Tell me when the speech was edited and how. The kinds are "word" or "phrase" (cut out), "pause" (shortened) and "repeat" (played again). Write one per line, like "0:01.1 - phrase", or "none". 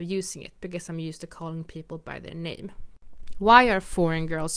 none